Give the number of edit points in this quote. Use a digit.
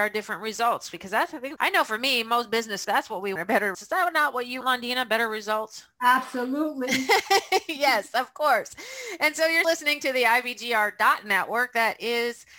6